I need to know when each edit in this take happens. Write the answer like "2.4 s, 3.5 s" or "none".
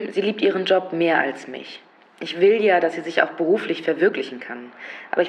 none